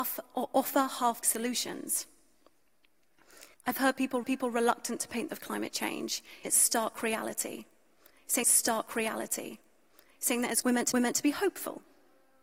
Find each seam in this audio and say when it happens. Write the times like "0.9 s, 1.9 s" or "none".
1.2 s, 3.5 s, 4.2 s, 5.3 s, 6.4 s, 8.4 s, 10.6 s, 10.9 s